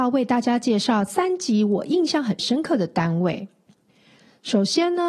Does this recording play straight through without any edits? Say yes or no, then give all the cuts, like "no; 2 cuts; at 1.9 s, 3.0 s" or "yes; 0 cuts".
yes; 0 cuts